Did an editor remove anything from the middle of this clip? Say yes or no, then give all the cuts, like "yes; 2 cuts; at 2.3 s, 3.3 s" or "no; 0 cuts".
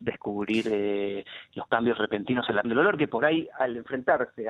yes; 1 cut; at 2.6 s